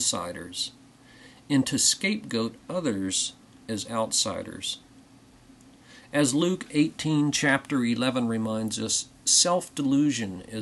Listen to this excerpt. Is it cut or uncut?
uncut